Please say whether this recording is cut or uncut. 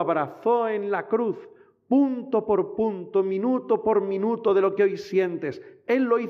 uncut